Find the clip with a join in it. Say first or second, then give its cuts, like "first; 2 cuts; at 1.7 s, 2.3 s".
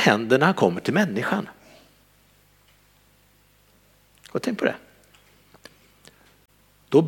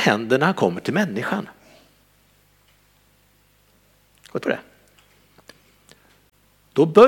second; 1 cut; at 4.4 s